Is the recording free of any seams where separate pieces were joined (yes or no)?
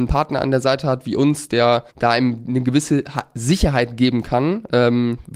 no